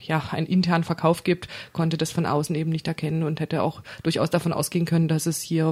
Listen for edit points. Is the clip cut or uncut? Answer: uncut